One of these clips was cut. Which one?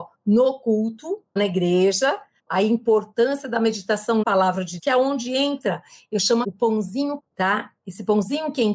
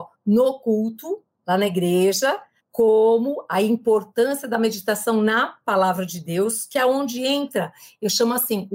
first; 6 cuts; at 1.4 s, 2.5 s, 4.2 s, 4.8 s, 6.4 s, 7.2 s

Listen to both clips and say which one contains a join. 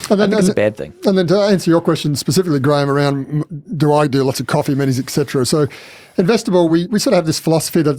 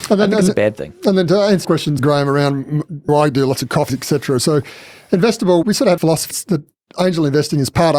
second; 7 cuts; at 1.6 s, 2.0 s, 3.1 s, 3.9 s, 5.6 s, 6.0 s, 6.3 s

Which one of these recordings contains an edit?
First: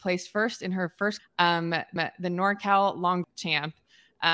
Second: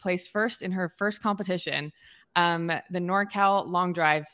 first; 3 cuts; at 1.2 s, 2.0 s, 3.2 s

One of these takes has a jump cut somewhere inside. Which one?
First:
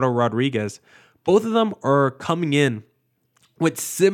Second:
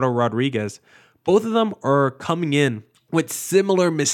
second; 1 cut; at 2.9 s

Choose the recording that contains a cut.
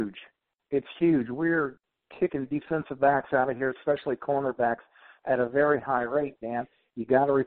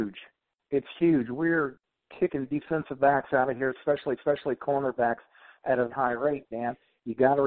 second; 2 cuts; at 4.2 s, 5.9 s

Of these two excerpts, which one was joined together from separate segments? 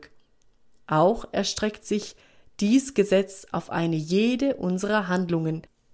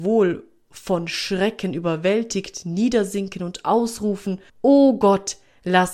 second; 1 cut; at 4.5 s

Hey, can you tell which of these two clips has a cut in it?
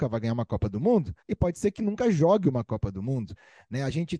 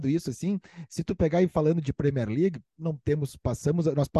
first; 1 cut; at 1.2 s

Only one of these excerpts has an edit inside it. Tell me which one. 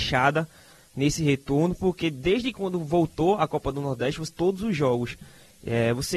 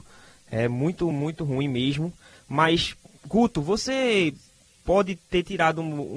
first; 1 cut; at 4.3 s

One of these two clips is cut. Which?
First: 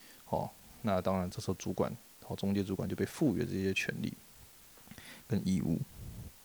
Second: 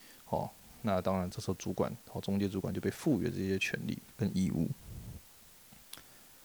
second; 2 cuts; at 2.0 s, 4.1 s

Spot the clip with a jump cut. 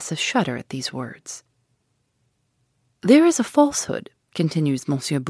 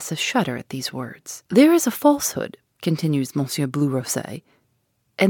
second; 1 cut; at 1.5 s

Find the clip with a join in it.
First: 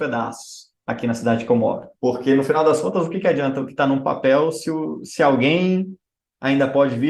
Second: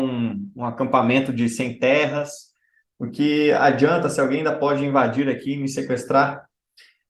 first; 1 cut; at 1.9 s

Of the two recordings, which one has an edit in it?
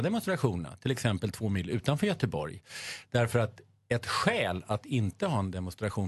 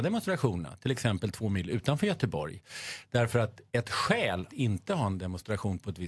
second; 2 cuts; at 3.7 s, 4.5 s

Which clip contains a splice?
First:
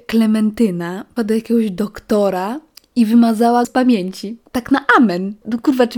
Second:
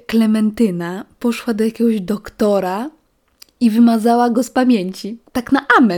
first; 3 cuts; at 1.2 s, 2.7 s, 3.6 s

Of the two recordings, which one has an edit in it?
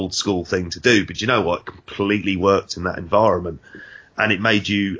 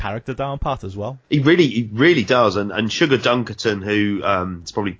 second; 1 cut; at 1.2 s

